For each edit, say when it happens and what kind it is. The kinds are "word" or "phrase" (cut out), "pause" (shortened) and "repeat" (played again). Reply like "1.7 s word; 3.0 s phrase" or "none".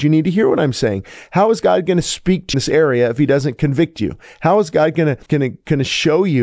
2.5 s phrase; 5.3 s pause